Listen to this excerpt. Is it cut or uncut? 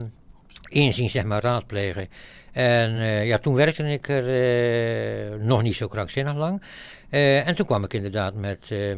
uncut